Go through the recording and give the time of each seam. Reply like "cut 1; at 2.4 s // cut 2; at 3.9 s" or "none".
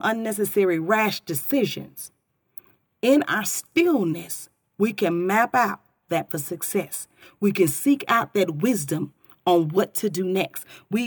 cut 1; at 6.3 s